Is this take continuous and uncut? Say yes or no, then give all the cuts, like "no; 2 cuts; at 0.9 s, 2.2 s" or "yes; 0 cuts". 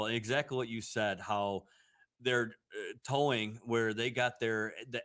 yes; 0 cuts